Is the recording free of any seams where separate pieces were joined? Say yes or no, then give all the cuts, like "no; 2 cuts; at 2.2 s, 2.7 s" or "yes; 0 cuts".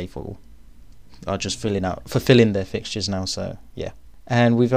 yes; 0 cuts